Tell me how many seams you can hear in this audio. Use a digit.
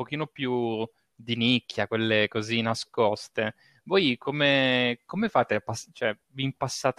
0